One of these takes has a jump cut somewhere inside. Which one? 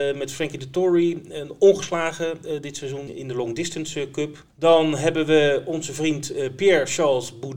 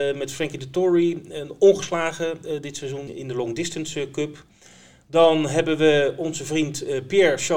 first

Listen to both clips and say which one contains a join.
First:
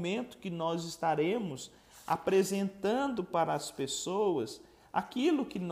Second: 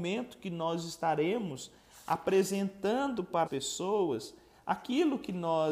second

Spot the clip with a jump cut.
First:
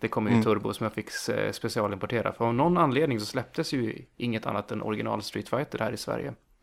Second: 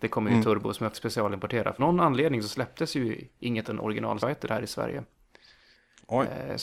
second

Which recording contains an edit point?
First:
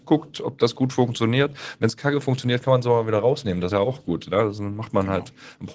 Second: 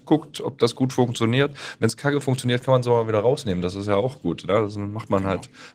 first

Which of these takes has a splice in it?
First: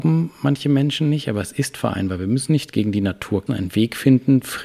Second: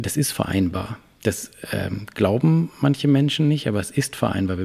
first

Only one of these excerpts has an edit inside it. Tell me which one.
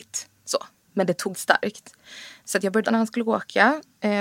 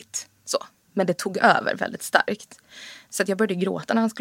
first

